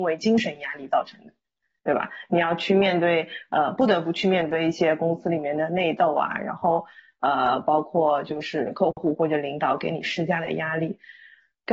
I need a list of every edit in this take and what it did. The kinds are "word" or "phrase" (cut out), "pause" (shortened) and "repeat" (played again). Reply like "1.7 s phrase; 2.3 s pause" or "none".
none